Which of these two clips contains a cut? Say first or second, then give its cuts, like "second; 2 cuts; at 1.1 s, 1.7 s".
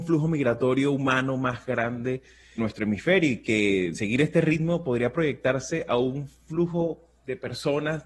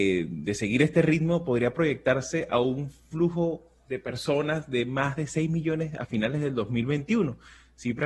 first; 2 cuts; at 2.6 s, 3.9 s